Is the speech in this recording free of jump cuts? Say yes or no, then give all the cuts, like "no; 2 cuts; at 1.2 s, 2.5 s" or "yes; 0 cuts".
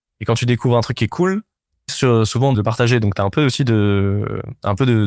no; 2 cuts; at 1.9 s, 2.5 s